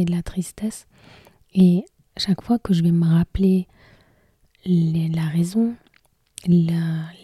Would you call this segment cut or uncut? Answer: uncut